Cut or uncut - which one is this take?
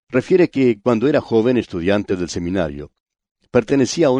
uncut